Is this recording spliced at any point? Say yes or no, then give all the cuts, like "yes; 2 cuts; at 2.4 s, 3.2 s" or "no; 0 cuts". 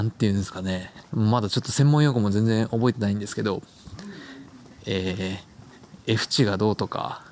no; 0 cuts